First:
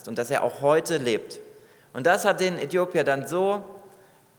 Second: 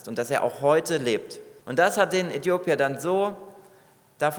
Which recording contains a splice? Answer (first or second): second